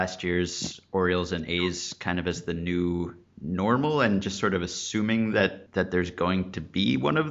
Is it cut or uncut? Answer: cut